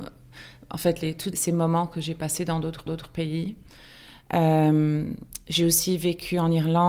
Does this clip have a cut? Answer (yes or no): yes